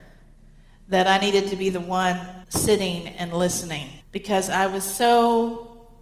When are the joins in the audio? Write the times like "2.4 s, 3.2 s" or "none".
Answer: 2.4 s, 4.0 s